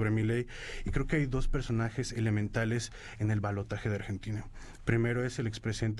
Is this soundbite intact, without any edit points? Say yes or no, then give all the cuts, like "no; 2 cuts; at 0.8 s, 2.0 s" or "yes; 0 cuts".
yes; 0 cuts